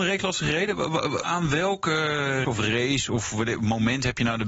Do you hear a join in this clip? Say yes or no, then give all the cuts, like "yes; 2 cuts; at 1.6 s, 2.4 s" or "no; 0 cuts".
yes; 2 cuts; at 1.2 s, 2.4 s